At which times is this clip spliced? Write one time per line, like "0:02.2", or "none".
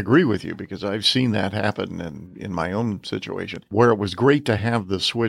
none